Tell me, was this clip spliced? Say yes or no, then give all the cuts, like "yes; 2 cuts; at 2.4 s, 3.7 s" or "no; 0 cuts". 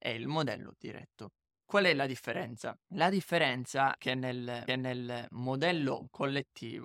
yes; 3 cuts; at 2.8 s, 4.0 s, 4.7 s